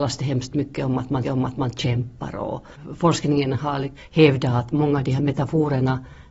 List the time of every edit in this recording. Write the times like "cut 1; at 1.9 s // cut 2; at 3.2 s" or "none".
cut 1; at 1.2 s